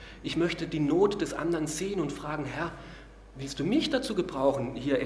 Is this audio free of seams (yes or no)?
yes